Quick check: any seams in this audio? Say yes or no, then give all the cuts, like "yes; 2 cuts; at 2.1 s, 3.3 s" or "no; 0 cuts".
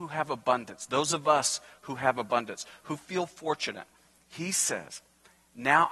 no; 0 cuts